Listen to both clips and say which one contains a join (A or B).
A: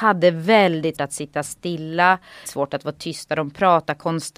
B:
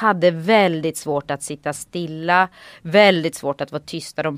A